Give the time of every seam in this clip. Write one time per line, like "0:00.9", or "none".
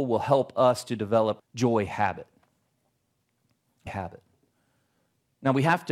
0:01.4
0:03.9